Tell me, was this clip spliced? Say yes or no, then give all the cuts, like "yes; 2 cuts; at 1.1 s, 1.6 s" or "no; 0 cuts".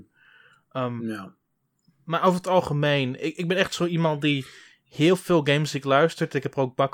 no; 0 cuts